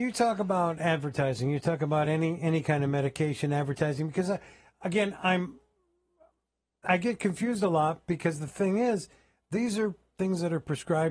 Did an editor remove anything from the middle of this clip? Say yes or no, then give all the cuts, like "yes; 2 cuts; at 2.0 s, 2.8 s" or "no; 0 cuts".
no; 0 cuts